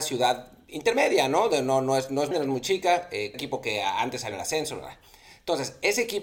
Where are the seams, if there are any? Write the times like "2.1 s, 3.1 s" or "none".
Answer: 2.3 s, 3.3 s, 4.3 s